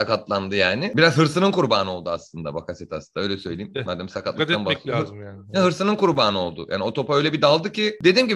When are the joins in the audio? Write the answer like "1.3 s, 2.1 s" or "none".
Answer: none